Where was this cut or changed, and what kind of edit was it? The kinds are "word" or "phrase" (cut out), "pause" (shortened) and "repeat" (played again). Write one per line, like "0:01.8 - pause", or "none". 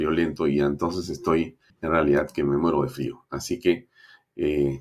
0:01.7 - pause